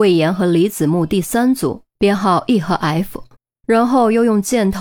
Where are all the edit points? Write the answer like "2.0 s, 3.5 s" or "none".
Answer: 1.9 s, 3.4 s